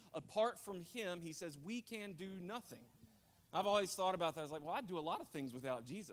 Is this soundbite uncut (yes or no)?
yes